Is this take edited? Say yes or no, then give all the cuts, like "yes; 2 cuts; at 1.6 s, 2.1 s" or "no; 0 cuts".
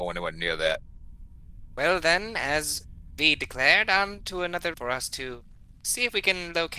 yes; 1 cut; at 4.7 s